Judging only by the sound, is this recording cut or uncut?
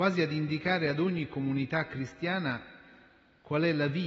uncut